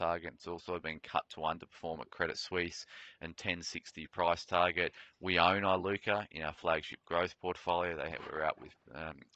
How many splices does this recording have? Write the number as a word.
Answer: zero